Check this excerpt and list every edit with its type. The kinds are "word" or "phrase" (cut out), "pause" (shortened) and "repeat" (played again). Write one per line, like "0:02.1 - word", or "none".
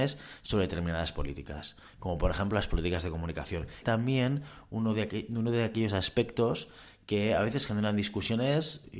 0:03.8 - phrase